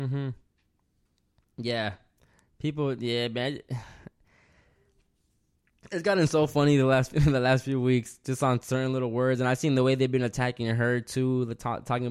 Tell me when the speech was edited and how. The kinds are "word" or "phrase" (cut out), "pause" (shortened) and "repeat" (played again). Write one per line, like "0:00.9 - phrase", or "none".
none